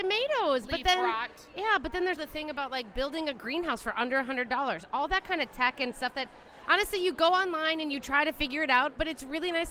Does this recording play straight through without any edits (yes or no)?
no